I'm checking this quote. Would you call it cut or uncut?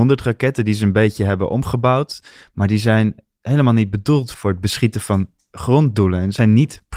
uncut